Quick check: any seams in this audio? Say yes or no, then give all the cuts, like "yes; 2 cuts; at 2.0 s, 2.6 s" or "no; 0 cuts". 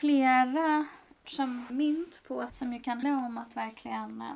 yes; 4 cuts; at 1.2 s, 1.7 s, 2.5 s, 3.0 s